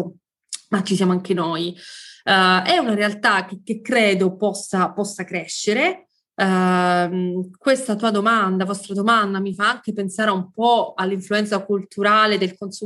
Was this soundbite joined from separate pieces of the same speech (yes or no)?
no